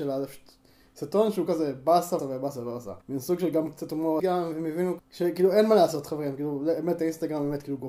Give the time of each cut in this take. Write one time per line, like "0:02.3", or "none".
0:01.5
0:02.2
0:03.0
0:04.2
0:05.0